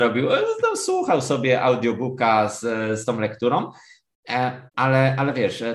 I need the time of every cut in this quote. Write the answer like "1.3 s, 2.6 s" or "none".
3.0 s, 4.7 s